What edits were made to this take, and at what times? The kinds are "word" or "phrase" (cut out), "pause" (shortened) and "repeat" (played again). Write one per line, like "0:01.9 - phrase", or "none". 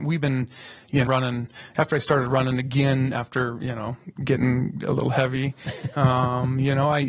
0:01.1 - phrase